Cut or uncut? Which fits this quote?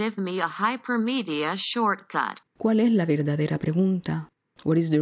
cut